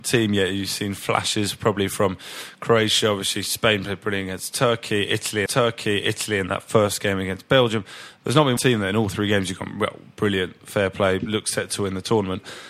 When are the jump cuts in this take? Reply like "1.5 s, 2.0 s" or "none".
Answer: 5.5 s, 8.6 s